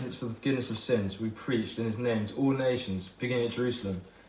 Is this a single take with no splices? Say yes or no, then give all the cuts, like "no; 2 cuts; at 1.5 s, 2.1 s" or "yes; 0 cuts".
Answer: yes; 0 cuts